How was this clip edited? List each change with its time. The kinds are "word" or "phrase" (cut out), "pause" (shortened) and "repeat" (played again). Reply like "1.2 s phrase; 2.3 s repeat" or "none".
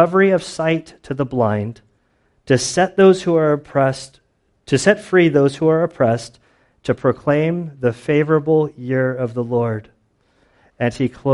none